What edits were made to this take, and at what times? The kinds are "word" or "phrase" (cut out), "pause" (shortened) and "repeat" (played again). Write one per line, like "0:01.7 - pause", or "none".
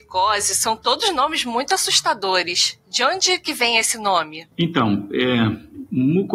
0:04.5 - pause